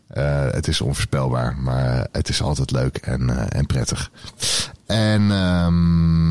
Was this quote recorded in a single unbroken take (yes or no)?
yes